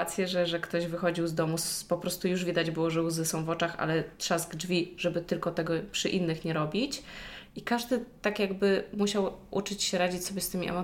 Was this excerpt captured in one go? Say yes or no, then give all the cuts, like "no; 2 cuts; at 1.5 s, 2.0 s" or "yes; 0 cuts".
yes; 0 cuts